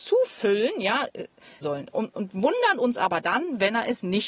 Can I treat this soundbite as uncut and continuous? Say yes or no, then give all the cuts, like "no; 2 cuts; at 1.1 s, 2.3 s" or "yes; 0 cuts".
no; 1 cut; at 1.6 s